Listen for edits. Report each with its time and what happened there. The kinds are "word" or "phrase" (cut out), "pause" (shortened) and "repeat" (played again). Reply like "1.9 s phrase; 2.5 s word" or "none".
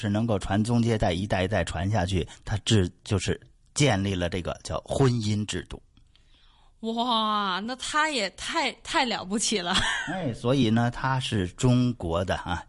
3.5 s pause